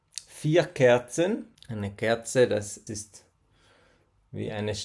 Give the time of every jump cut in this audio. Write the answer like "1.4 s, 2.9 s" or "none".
1.6 s, 2.9 s